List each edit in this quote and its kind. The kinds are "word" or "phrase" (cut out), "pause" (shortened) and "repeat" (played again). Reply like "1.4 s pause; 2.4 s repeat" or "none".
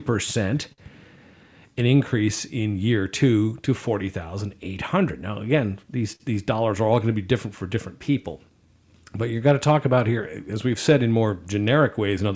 none

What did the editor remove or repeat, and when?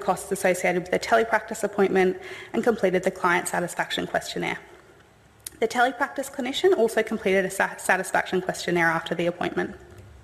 none

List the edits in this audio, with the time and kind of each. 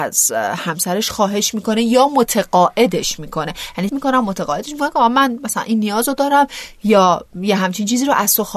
3.9 s word

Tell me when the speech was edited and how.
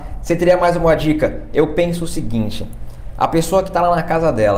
none

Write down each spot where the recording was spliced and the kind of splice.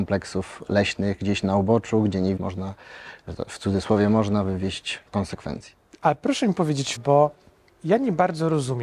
2.4 s word; 5.1 s word; 7.0 s word

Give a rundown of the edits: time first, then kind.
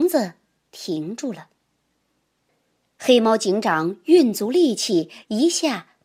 none

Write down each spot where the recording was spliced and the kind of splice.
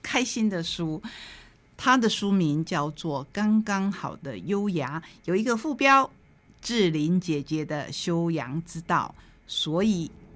9.2 s pause

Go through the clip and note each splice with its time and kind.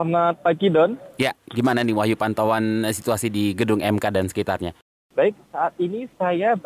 none

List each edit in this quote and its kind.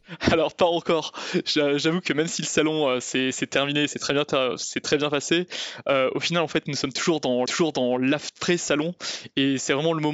7.5 s repeat

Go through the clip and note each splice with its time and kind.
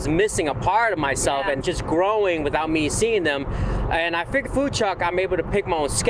1.6 s phrase; 4.5 s word

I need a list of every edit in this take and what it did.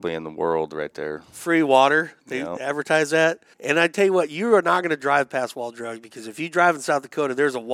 3.5 s pause

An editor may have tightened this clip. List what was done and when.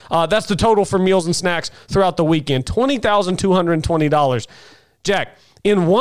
none

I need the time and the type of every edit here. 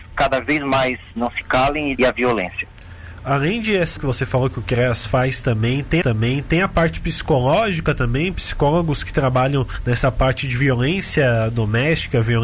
2.0 s phrase; 4.0 s word; 6.0 s repeat

